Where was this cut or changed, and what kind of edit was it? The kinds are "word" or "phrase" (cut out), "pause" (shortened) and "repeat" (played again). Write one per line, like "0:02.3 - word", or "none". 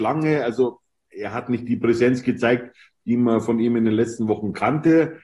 none